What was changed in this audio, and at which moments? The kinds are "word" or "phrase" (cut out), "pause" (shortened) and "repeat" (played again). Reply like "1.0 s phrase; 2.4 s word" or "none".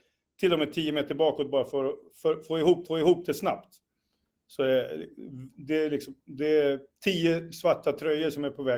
2.9 s repeat